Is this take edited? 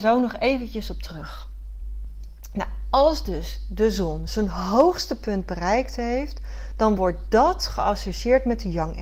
no; 0 cuts

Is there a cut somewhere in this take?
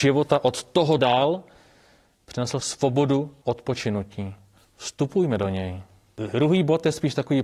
yes; 3 cuts; at 1.0 s, 2.6 s, 3.4 s

